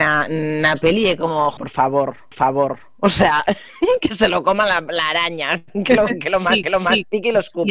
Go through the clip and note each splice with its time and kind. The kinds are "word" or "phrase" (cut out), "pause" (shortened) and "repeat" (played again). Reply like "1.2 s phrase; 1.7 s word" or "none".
1.6 s word; 2.3 s repeat; 6.6 s repeat